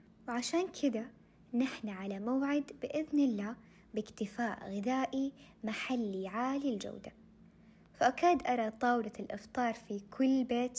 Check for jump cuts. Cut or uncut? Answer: uncut